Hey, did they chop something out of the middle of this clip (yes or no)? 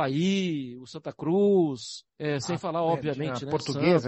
yes